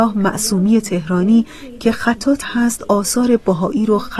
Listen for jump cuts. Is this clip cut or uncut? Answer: cut